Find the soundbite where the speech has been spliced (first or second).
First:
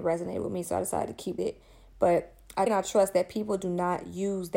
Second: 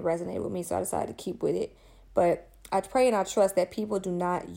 first